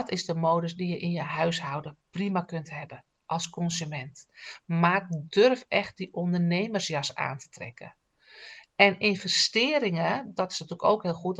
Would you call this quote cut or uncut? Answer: uncut